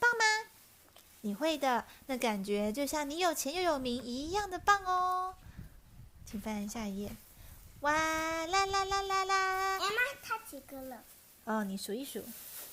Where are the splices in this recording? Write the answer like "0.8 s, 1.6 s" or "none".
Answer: none